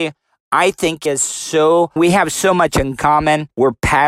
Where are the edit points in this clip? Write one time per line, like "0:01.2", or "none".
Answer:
0:01.1
0:02.0